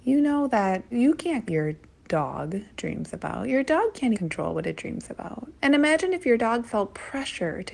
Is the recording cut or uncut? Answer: cut